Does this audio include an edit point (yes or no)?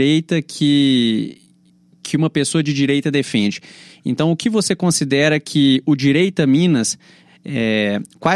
no